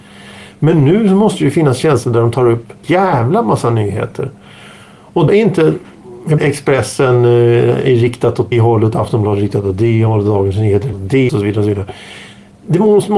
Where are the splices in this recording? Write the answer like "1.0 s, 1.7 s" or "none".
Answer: 2.8 s, 5.3 s, 6.4 s, 8.5 s, 10.9 s, 11.3 s